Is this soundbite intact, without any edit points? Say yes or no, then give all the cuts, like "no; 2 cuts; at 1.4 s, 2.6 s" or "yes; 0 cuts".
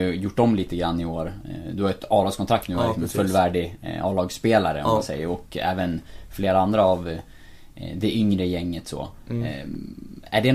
yes; 0 cuts